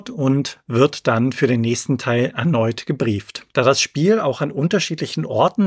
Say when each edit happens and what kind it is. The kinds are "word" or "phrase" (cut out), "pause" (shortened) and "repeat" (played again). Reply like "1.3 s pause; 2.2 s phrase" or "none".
3.5 s pause